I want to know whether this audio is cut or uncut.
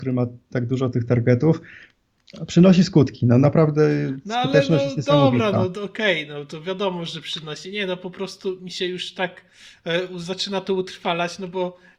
uncut